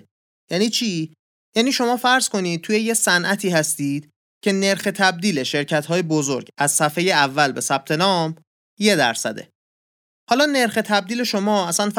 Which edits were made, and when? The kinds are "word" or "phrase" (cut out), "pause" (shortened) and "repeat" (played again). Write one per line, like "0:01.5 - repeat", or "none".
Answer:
none

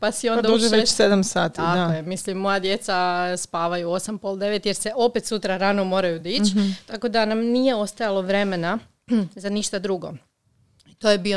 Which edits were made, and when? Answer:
none

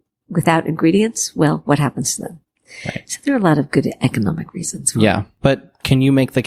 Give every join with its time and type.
none

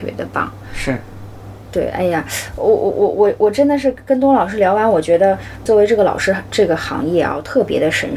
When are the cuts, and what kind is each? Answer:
0:05.7 - word

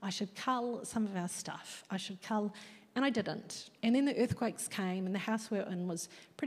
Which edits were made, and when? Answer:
0:03.8 - pause

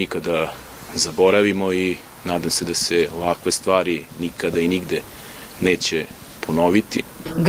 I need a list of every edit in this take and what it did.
none

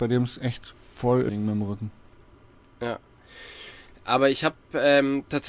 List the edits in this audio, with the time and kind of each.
0:01.3 - word

